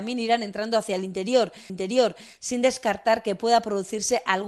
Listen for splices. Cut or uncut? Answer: cut